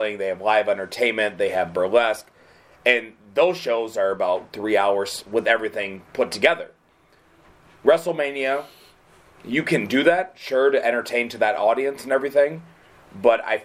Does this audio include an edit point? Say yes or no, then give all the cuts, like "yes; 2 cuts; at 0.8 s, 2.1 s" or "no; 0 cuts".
no; 0 cuts